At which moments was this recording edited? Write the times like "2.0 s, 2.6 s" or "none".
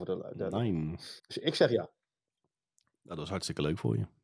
1.2 s, 2.2 s